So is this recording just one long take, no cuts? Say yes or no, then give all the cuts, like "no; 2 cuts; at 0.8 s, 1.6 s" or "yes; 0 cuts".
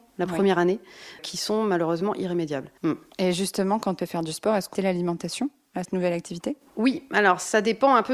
no; 5 cuts; at 1.2 s, 2.8 s, 4.0 s, 4.7 s, 5.8 s